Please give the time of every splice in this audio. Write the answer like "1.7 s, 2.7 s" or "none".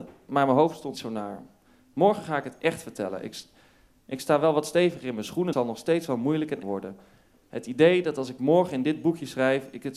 0.9 s, 5.5 s, 6.6 s